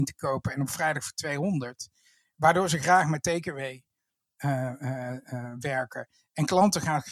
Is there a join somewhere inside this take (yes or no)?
no